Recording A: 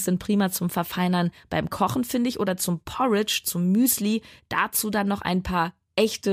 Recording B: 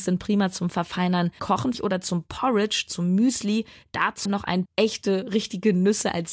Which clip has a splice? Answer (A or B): B